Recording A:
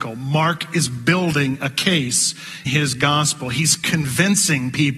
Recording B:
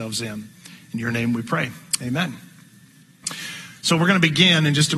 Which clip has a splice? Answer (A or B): A